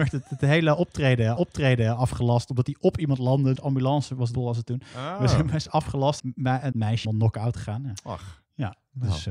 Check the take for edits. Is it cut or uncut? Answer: cut